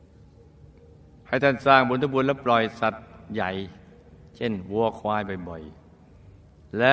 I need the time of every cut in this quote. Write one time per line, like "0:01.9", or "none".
none